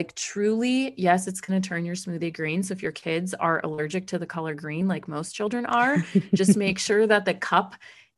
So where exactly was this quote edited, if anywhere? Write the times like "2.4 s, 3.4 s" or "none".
none